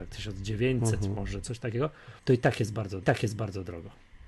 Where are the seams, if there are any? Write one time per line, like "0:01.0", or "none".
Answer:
0:01.4
0:02.2
0:03.0